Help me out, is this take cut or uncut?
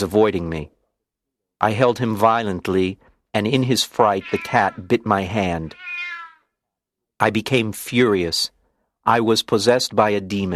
uncut